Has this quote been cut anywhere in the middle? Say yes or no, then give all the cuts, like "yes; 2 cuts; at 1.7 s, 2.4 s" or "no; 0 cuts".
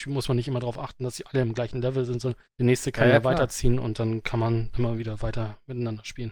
yes; 2 cuts; at 2.5 s, 4.7 s